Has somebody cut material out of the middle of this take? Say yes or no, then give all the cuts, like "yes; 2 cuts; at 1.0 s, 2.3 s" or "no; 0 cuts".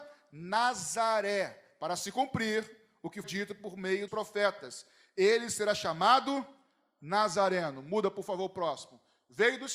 yes; 2 cuts; at 3.2 s, 4.1 s